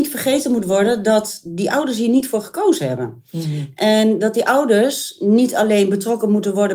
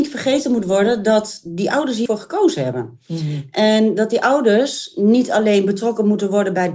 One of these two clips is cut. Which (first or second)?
second